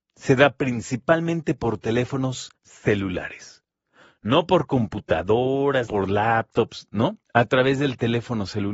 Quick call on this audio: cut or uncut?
cut